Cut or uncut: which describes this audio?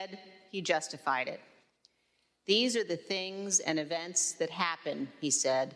uncut